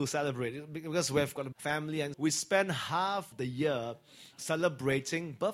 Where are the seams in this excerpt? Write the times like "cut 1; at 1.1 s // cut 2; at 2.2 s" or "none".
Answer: cut 1; at 1.5 s // cut 2; at 2.1 s // cut 3; at 3.3 s